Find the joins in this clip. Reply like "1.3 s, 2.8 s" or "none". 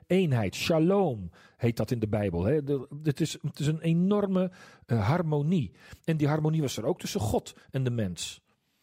none